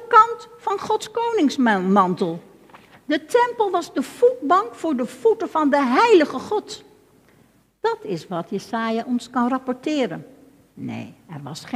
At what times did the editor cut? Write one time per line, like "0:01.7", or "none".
none